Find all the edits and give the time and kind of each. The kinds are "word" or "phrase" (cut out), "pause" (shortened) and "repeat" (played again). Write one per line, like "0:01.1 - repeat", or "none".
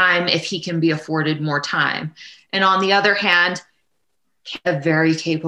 none